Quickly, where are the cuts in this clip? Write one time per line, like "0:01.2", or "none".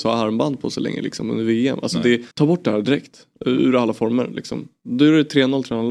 0:02.3